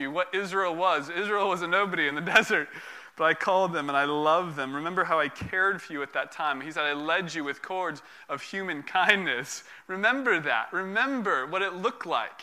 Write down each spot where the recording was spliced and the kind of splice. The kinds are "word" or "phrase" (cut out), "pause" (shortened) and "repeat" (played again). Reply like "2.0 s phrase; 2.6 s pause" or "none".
none